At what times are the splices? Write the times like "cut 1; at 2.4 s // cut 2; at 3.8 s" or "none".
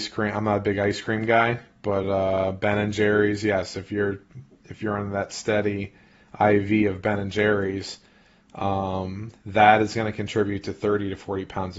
none